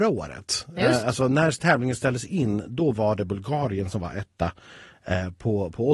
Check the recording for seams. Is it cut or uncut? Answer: uncut